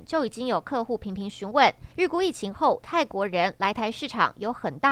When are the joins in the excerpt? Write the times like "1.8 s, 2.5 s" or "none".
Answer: 1.9 s